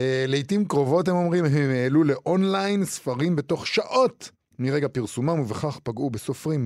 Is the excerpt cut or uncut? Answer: cut